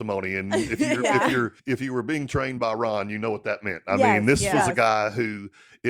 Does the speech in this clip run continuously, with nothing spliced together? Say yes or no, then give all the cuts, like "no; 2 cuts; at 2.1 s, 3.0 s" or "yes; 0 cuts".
no; 1 cut; at 1.6 s